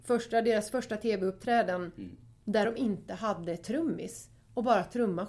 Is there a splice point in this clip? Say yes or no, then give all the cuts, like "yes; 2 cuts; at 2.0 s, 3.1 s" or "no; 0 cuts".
no; 0 cuts